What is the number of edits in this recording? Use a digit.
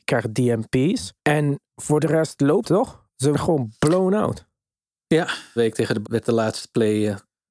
5